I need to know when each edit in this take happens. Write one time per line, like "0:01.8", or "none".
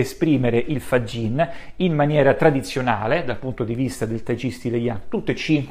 none